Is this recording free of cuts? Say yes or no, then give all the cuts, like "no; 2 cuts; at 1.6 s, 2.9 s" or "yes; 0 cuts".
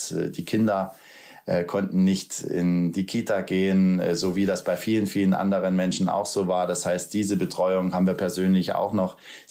yes; 0 cuts